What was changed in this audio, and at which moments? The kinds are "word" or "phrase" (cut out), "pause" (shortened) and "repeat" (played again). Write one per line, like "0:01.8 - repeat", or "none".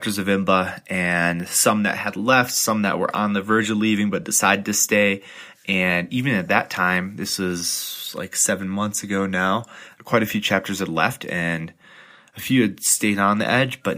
none